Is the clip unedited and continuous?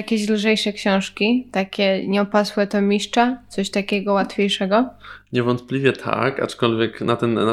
yes; 0 cuts

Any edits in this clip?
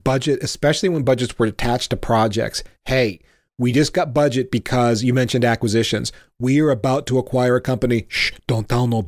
no; 0 cuts

